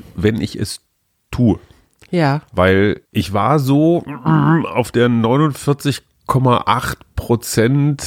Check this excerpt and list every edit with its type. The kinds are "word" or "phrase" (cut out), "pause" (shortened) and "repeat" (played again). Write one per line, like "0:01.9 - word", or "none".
0:03.1 - pause